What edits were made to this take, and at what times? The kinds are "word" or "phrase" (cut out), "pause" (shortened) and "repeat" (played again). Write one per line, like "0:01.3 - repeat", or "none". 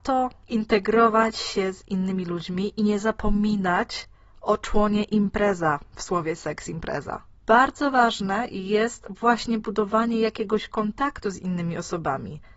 0:07.3 - pause